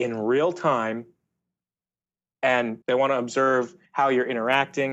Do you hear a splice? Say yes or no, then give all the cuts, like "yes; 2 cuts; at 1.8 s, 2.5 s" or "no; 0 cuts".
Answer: yes; 2 cuts; at 2.8 s, 3.9 s